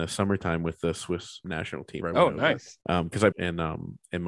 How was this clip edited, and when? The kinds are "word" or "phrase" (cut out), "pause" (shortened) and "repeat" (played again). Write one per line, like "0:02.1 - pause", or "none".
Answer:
0:01.4 - word
0:02.0 - word
0:02.8 - pause
0:03.3 - phrase